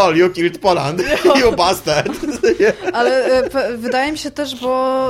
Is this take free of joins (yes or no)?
yes